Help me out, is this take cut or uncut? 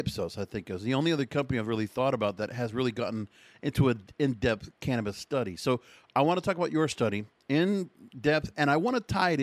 uncut